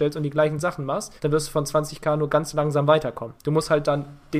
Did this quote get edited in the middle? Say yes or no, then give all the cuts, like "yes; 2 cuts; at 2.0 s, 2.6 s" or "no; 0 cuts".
yes; 2 cuts; at 1.2 s, 3.4 s